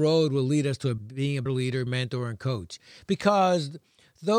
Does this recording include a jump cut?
yes; 3 cuts; at 1.0 s, 1.5 s, 1.9 s

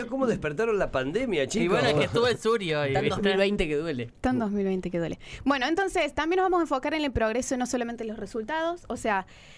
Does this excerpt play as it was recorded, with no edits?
yes; 0 cuts

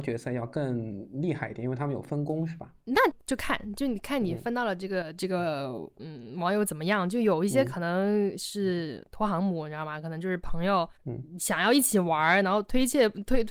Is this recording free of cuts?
no; 2 cuts; at 2.8 s, 10.9 s

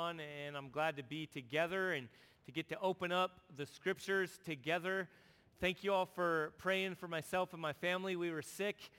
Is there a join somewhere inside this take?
no; 0 cuts

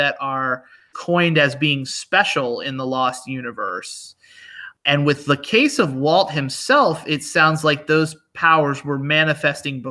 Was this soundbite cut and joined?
yes; 1 cut; at 0.9 s

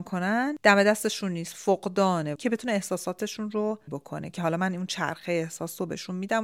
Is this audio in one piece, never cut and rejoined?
no; 2 cuts; at 2.3 s, 3.9 s

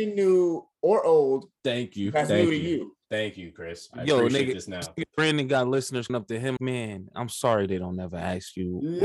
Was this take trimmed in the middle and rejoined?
yes; 2 cuts; at 6.1 s, 6.6 s

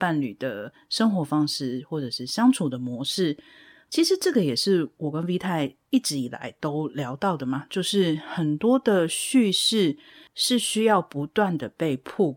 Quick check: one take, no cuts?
yes; 0 cuts

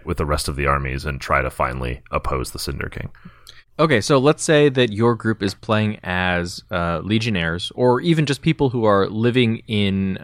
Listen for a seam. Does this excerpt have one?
no; 0 cuts

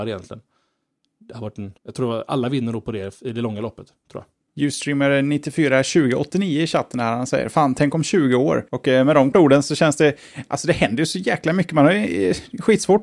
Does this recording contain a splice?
yes; 4 cuts; at 1.8 s, 4.5 s, 8.7 s, 9.3 s

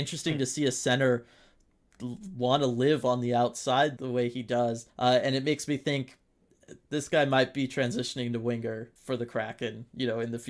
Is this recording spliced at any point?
yes; 3 cuts; at 4.0 s, 4.9 s, 9.0 s

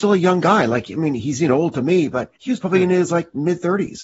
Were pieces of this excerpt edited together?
yes; 1 cut; at 2.4 s

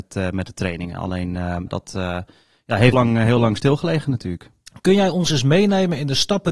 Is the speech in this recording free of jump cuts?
no; 2 cuts; at 1.7 s, 2.9 s

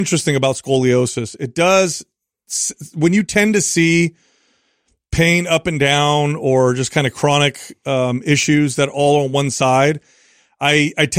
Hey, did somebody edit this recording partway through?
no; 0 cuts

